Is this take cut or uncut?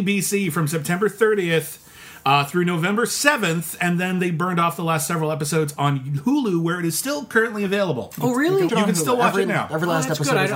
cut